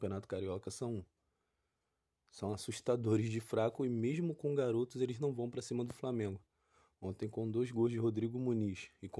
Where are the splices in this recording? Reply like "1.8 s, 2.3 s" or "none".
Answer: none